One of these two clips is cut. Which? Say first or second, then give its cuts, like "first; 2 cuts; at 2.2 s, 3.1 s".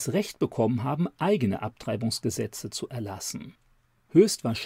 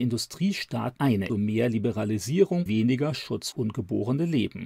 second; 4 cuts; at 1.0 s, 1.3 s, 2.7 s, 3.5 s